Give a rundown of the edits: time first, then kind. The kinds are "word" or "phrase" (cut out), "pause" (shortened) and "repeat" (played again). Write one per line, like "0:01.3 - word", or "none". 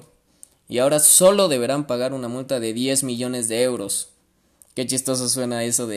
none